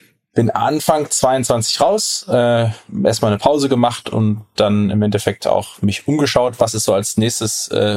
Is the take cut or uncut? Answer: uncut